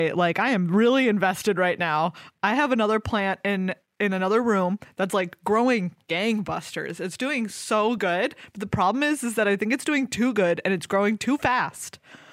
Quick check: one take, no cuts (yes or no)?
yes